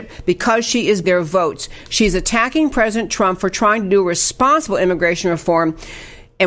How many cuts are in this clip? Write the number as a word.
one